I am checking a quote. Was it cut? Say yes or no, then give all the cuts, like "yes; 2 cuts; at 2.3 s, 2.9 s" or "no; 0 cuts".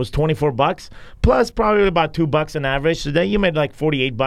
no; 0 cuts